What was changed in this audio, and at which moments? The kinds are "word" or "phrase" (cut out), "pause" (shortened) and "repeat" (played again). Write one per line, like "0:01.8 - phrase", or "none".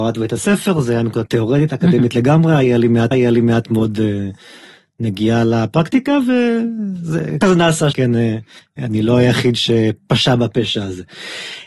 0:01.3 - word
0:03.1 - repeat
0:07.4 - word
0:07.9 - word
0:08.6 - pause